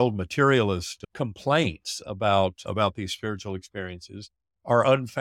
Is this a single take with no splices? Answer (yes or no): yes